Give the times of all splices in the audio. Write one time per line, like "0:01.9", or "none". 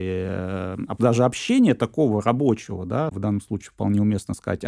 0:01.0